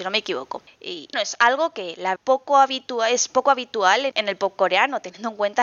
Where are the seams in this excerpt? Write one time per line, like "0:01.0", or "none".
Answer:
0:01.1
0:02.2
0:04.1